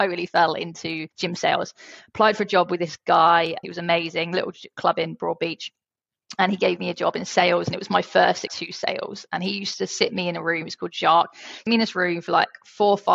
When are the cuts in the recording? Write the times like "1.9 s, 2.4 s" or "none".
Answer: 1.1 s, 8.5 s, 11.7 s